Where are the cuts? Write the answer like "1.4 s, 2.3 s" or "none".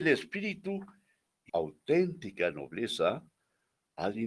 1.5 s